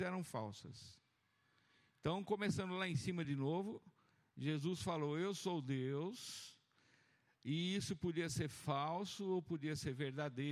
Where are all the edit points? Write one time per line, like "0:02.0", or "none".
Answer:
none